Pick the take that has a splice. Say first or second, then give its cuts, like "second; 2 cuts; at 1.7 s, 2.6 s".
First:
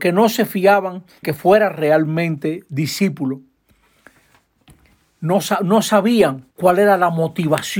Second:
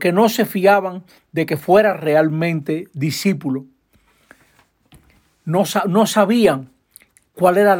first; 2 cuts; at 1.2 s, 6.5 s